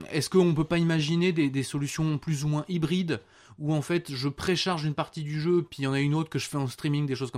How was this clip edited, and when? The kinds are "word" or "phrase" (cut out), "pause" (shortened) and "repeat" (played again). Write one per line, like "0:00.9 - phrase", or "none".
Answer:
none

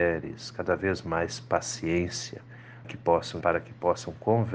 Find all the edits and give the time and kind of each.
0:02.8 - word
0:03.4 - word

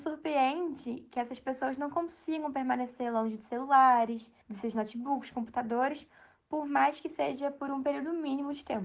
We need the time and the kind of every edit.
0:04.4 - pause

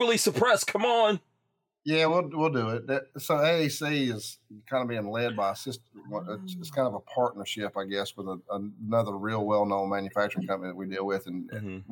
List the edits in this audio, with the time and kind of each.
none

